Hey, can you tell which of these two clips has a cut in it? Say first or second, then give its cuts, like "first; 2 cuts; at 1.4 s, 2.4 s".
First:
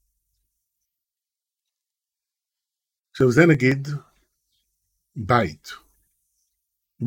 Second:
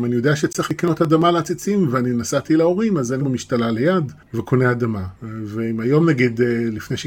second; 3 cuts; at 3.2 s, 4.2 s, 5.2 s